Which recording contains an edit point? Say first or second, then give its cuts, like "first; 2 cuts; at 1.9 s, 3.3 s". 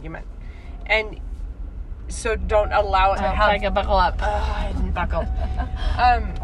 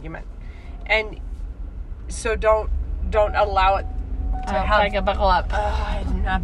first; 3 cuts; at 2.4 s, 3.2 s, 4.9 s